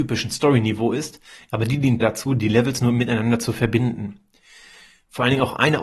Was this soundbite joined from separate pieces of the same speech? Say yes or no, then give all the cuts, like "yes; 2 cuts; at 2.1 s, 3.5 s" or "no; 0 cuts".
yes; 1 cut; at 2.0 s